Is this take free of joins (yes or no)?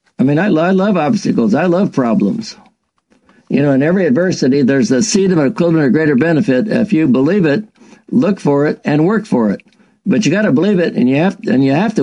yes